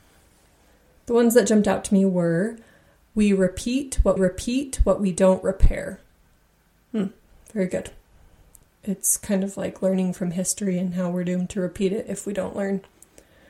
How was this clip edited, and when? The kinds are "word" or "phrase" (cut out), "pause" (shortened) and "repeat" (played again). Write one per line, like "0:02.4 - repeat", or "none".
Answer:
0:04.2 - repeat

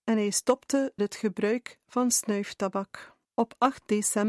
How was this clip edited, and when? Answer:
0:01.0 - word
0:03.2 - pause

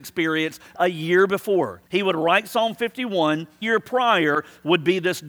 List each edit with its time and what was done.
0:01.9 - pause
0:03.6 - word

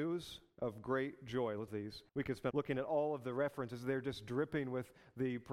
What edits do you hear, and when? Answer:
0:01.7 - phrase
0:02.1 - pause
0:02.5 - phrase

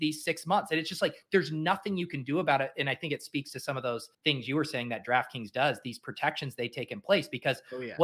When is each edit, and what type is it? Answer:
0:04.1 - pause

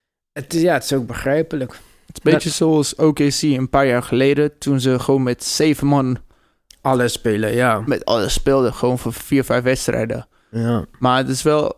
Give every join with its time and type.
none

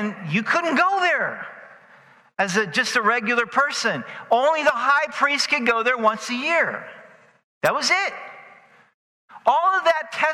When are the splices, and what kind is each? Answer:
none

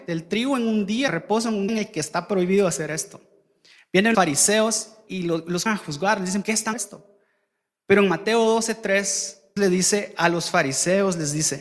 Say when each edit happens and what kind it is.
0:01.1 - word
0:01.7 - word
0:04.1 - word
0:05.1 - word
0:05.7 - word
0:06.4 - word
0:06.7 - word
0:09.6 - word

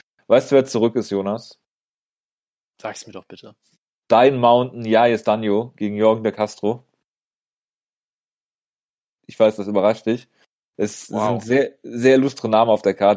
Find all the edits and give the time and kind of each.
none

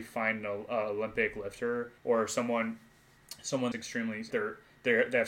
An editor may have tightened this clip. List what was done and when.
0:02.0 - pause
0:03.7 - word
0:04.3 - word

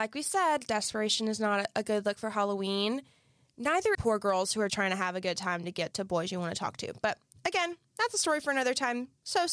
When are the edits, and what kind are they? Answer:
0:03.9 - phrase
0:04.7 - word
0:05.9 - word

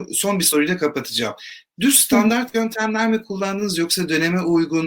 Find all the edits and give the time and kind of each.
none

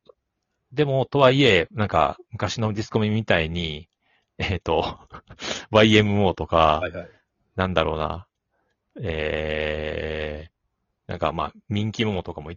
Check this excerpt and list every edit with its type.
none

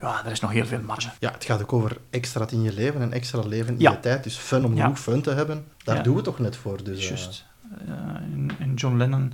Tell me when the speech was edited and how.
0:01.2 - pause
0:02.5 - word
0:04.6 - phrase
0:05.7 - pause

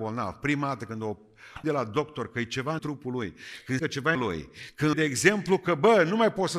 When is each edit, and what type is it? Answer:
0:01.6 - word
0:02.8 - phrase
0:03.8 - word
0:04.2 - phrase
0:04.9 - word

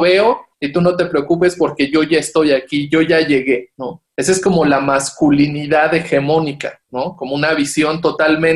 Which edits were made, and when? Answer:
none

